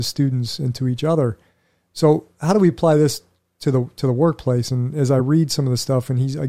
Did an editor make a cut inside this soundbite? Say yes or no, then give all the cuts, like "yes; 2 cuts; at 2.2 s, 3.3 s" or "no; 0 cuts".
no; 0 cuts